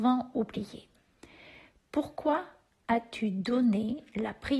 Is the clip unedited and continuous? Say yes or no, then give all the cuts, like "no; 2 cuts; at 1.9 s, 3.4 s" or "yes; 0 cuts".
yes; 0 cuts